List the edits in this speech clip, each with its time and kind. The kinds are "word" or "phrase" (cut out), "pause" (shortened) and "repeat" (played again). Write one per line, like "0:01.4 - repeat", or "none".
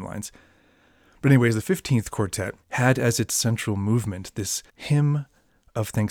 0:02.6 - pause
0:04.7 - pause